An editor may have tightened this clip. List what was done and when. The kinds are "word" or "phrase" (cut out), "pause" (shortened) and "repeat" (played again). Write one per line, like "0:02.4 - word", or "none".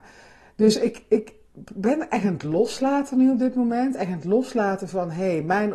none